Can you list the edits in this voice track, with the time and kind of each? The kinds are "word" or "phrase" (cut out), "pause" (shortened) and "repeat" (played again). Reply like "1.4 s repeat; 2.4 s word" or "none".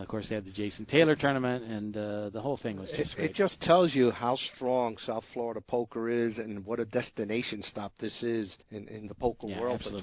8.6 s pause